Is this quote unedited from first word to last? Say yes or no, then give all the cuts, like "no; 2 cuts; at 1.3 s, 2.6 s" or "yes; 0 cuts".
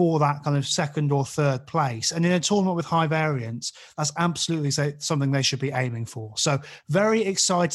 yes; 0 cuts